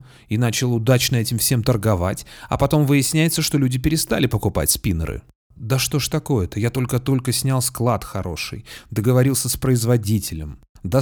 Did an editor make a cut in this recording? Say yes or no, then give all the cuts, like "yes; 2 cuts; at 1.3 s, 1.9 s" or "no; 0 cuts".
no; 0 cuts